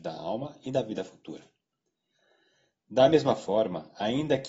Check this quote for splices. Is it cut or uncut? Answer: uncut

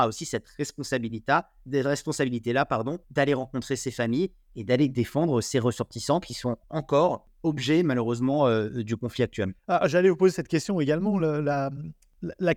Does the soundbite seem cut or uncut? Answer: cut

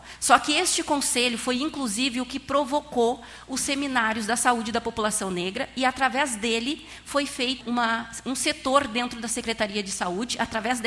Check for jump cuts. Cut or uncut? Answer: cut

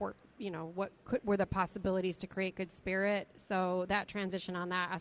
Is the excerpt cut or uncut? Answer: uncut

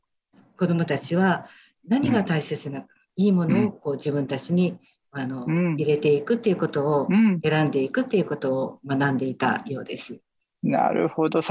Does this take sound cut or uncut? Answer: uncut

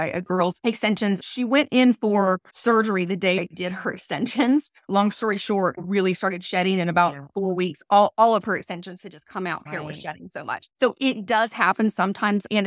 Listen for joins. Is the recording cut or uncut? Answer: cut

